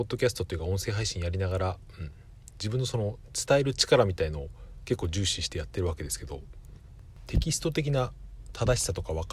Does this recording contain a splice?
no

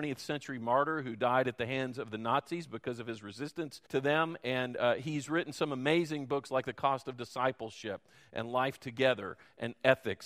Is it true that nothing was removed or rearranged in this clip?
no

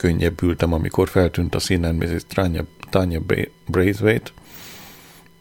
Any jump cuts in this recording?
no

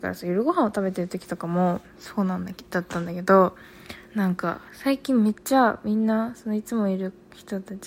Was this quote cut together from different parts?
yes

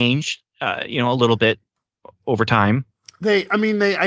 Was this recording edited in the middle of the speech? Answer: no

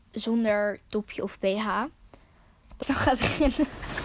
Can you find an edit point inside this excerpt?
yes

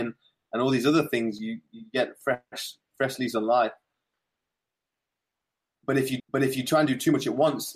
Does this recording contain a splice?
yes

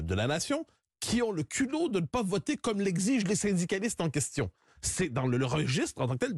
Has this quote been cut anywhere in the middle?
no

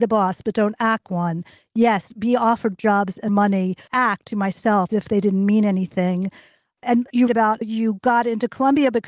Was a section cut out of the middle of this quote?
yes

